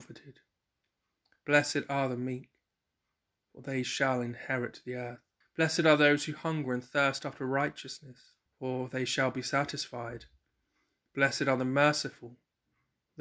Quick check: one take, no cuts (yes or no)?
no